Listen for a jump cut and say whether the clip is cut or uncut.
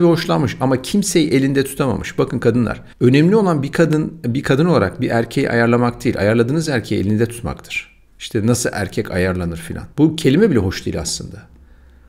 cut